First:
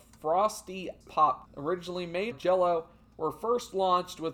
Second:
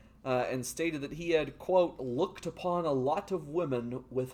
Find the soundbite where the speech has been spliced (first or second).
first